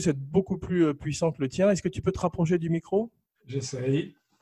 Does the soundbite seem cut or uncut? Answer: uncut